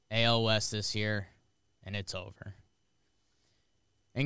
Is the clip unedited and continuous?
yes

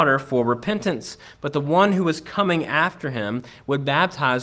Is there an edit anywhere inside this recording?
no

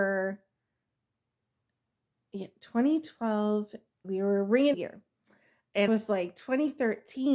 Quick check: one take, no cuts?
no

